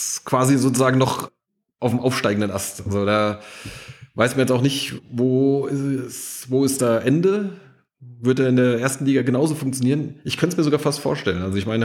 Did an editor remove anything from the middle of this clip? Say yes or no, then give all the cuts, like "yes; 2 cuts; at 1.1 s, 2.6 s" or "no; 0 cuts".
no; 0 cuts